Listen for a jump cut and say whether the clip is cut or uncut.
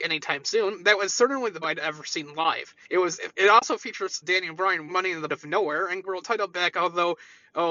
cut